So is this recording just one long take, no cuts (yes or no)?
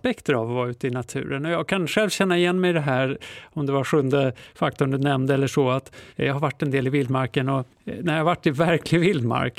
no